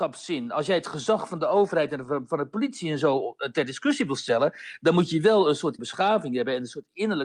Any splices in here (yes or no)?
yes